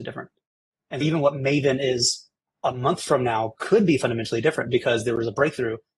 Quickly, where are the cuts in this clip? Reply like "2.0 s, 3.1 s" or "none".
1.0 s